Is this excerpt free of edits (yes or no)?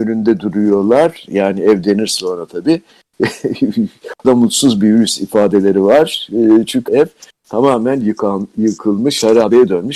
no